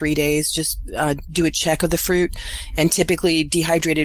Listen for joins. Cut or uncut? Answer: uncut